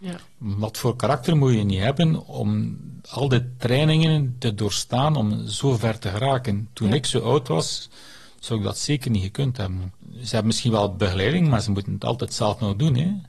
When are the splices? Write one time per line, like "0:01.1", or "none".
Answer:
0:10.0